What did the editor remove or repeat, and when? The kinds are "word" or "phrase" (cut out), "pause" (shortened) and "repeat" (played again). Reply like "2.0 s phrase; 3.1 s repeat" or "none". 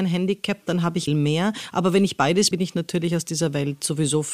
1.1 s word; 2.5 s word